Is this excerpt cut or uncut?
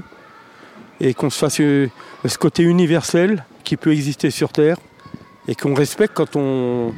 uncut